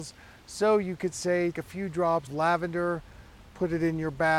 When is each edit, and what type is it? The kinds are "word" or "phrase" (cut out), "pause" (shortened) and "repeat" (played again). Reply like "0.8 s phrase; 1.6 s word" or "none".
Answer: 1.5 s word; 2.3 s word